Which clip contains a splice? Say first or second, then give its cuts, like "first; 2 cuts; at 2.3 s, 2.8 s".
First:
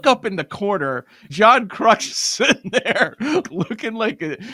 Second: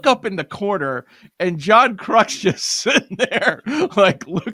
first; 3 cuts; at 1.3 s, 2.1 s, 3.4 s